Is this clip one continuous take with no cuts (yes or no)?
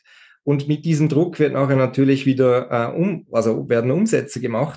yes